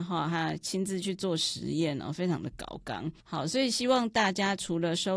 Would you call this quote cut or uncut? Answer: cut